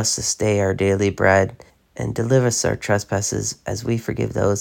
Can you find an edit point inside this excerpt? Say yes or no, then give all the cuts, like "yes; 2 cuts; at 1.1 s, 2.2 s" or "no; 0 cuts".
yes; 1 cut; at 1.7 s